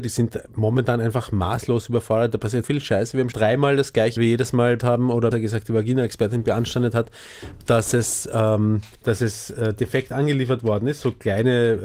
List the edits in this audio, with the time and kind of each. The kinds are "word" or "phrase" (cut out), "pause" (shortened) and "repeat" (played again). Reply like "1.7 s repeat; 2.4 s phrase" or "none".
2.6 s word; 3.3 s word; 4.2 s phrase; 4.8 s word; 5.3 s word; 8.9 s pause